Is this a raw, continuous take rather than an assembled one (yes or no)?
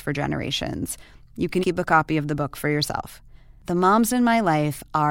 no